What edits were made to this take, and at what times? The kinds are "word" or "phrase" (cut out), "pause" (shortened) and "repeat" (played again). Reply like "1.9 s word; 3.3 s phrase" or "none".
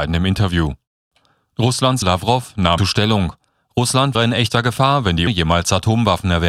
2.0 s word; 2.8 s word; 4.1 s word; 5.3 s word